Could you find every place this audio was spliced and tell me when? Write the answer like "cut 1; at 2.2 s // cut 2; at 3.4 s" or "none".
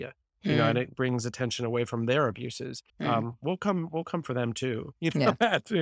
cut 1; at 2.9 s